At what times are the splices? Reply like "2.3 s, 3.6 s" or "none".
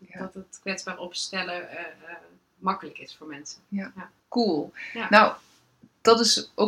4.2 s